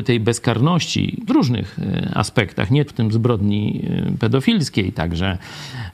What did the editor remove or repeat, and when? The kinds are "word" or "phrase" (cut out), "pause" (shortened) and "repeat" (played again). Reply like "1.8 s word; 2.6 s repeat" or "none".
1.3 s word; 2.9 s word